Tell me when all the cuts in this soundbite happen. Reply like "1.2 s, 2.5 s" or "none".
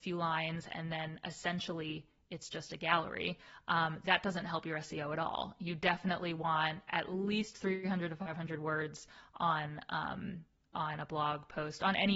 none